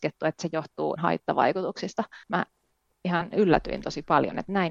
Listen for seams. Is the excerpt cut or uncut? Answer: cut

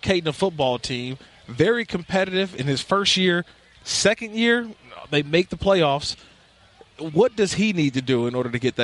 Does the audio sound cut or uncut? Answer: uncut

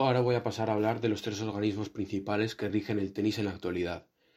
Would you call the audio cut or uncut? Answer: uncut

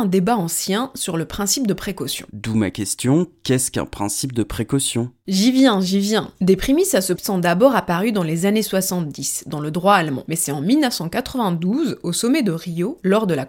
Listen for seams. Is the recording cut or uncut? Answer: cut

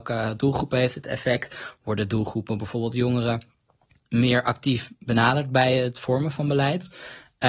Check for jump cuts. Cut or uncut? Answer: uncut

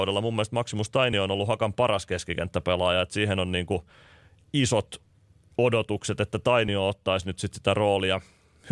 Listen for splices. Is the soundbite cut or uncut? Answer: uncut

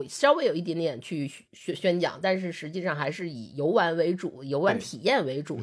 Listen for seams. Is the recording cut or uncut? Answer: cut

